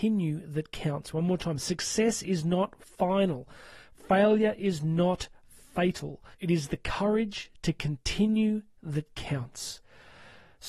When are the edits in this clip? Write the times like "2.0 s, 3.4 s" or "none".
6.3 s